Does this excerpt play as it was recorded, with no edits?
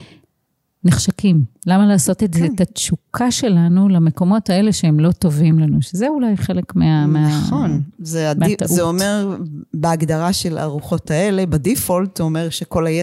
yes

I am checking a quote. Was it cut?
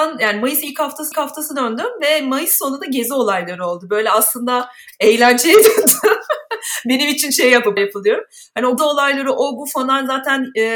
yes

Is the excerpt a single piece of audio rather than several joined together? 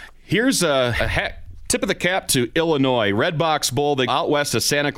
no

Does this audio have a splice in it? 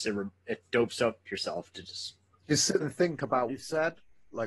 yes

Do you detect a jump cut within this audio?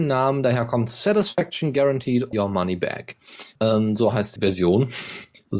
yes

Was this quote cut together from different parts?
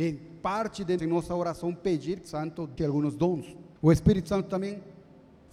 yes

